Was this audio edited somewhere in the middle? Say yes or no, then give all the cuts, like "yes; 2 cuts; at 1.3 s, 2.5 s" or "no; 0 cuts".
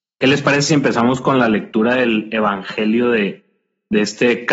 no; 0 cuts